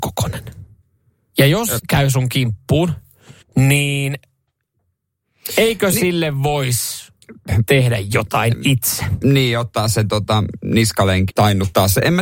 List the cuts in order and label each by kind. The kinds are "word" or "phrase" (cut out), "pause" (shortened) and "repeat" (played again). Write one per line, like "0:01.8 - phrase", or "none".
0:01.8 - word
0:03.4 - pause
0:11.3 - word